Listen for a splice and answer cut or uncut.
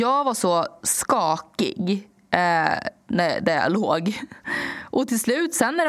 uncut